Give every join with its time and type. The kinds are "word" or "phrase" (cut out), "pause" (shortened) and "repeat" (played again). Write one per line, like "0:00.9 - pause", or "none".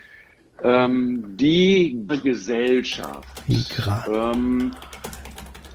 0:02.1 - word